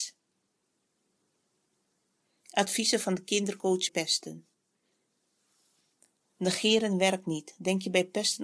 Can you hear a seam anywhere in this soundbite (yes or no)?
yes